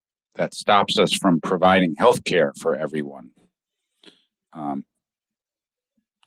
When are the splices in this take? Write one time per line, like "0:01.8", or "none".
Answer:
none